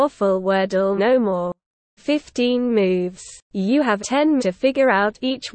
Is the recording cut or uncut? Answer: cut